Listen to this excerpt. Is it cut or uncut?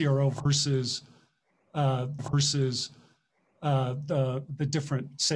cut